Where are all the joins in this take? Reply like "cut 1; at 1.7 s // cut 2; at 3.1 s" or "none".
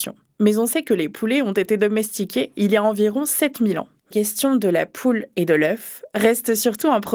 cut 1; at 4.1 s